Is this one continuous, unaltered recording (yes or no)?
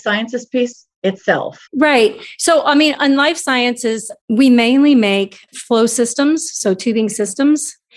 no